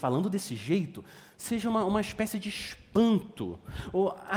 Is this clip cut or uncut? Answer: uncut